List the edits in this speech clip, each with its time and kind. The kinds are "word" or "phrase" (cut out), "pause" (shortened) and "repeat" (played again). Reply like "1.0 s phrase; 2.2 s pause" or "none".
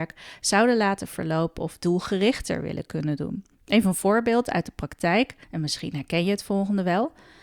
3.5 s pause; 5.4 s pause